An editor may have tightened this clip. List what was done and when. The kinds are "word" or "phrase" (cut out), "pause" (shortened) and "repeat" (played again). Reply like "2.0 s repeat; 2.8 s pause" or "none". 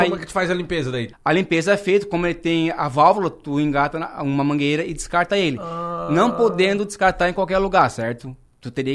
1.1 s pause